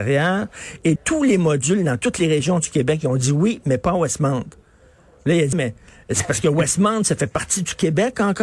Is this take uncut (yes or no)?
no